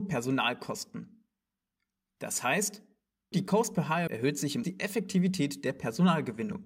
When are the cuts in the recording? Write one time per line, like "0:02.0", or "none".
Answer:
0:03.3
0:04.1
0:04.6